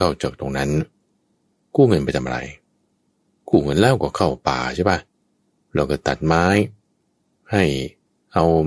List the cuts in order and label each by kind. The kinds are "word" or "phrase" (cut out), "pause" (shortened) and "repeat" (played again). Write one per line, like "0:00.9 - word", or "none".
none